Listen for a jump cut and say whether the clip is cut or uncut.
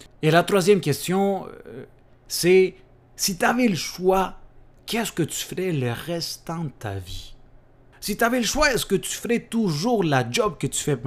uncut